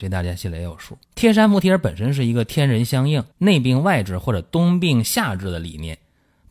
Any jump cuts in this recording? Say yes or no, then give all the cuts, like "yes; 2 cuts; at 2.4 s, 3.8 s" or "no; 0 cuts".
yes; 2 cuts; at 1.0 s, 3.3 s